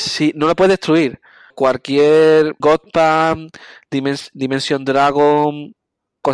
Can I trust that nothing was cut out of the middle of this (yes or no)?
no